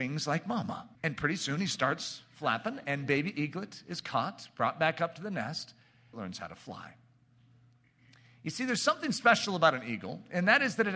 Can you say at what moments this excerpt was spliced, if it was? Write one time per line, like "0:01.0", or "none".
0:00.9
0:06.1